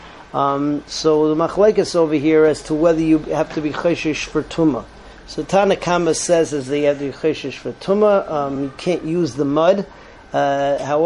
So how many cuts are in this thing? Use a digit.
0